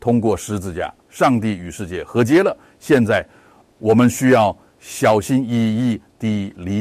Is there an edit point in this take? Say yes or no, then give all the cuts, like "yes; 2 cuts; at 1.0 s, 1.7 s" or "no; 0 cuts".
yes; 2 cuts; at 1.0 s, 3.6 s